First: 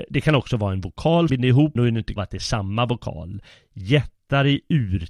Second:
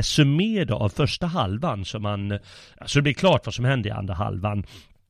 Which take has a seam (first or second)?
first